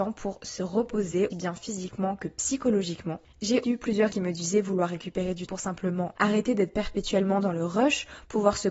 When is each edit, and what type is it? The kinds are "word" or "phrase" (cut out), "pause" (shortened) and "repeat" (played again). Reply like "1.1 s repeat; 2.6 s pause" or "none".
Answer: 1.3 s word; 3.6 s word; 4.1 s word; 5.5 s word; 6.1 s word